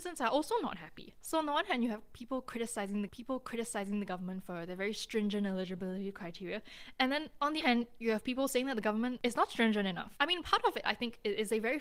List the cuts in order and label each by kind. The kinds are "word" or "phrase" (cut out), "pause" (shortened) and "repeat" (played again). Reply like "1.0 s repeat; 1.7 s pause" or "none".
3.1 s repeat; 7.6 s word